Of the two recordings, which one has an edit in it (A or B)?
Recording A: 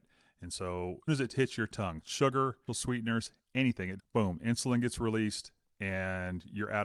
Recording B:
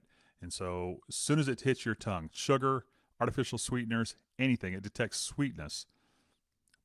A